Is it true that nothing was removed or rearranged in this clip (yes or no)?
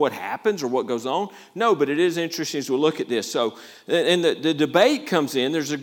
yes